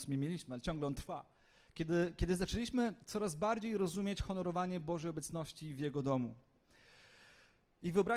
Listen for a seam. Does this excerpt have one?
yes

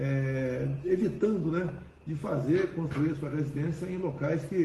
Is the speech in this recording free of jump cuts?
no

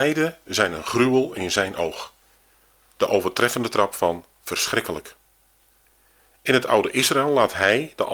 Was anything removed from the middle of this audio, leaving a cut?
no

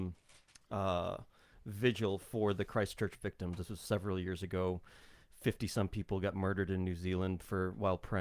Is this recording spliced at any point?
no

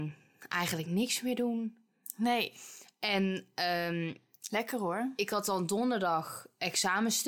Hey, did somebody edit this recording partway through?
no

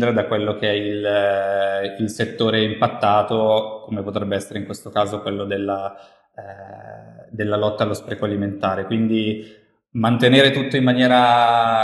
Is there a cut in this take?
no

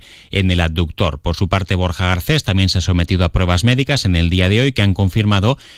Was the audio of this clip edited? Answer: no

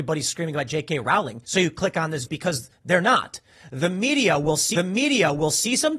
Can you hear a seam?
yes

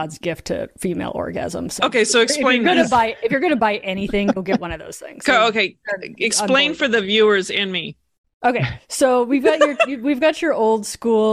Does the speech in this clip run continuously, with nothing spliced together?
yes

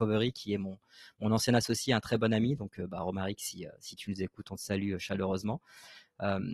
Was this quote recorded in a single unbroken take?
yes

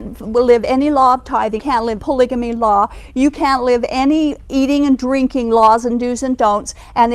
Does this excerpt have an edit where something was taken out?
yes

